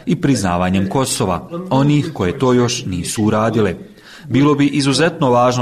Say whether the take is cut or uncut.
uncut